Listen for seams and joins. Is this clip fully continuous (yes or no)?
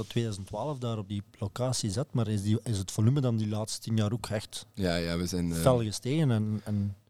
yes